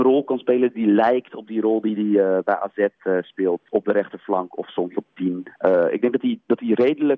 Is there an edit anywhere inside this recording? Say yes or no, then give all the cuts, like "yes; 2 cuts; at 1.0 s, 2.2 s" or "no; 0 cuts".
no; 0 cuts